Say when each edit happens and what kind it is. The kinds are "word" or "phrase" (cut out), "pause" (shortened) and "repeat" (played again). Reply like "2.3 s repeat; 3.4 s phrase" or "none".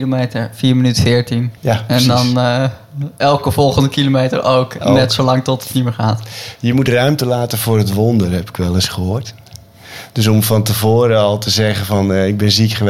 1.6 s pause